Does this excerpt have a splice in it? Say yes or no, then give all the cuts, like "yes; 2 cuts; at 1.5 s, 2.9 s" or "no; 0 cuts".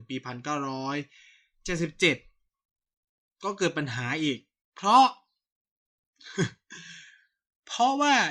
no; 0 cuts